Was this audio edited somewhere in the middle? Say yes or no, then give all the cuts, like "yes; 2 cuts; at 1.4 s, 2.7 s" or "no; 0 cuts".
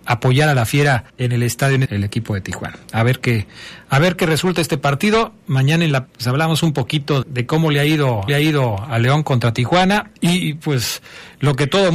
yes; 6 cuts; at 1.1 s, 1.8 s, 6.1 s, 7.2 s, 8.3 s, 10.2 s